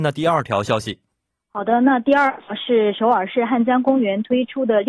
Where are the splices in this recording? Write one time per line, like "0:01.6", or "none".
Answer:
none